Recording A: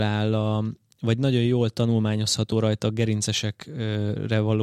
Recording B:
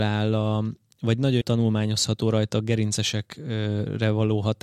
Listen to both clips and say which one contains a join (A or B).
B